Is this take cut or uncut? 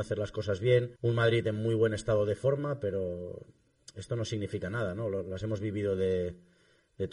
cut